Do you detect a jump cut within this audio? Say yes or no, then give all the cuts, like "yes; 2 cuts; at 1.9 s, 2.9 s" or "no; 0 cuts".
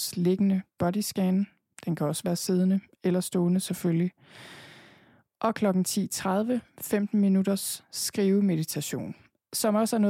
no; 0 cuts